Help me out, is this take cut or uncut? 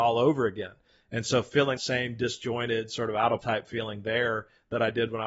cut